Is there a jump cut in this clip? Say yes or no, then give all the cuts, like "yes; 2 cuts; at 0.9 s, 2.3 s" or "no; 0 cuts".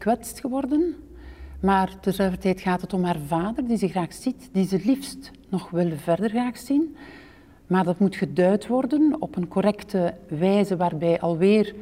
no; 0 cuts